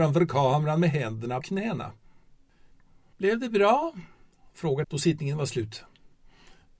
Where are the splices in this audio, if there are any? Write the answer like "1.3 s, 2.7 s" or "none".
1.4 s, 4.8 s